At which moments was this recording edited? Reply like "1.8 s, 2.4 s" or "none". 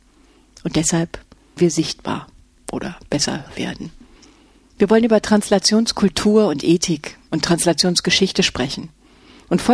1.6 s, 3.5 s